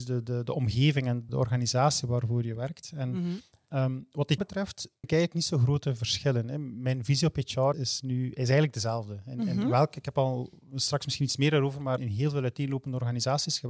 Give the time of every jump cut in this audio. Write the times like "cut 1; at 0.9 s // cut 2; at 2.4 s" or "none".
cut 1; at 1.3 s // cut 2; at 4.4 s // cut 3; at 5.0 s // cut 4; at 7.7 s // cut 5; at 12.0 s